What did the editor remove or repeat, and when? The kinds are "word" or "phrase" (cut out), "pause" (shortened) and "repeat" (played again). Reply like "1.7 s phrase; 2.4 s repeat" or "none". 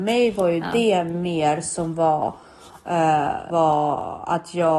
3.5 s word